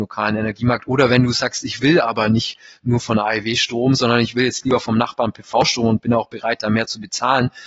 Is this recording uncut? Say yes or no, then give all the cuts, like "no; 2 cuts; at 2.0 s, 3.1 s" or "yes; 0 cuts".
yes; 0 cuts